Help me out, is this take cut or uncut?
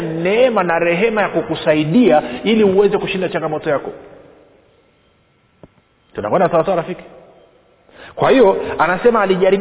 uncut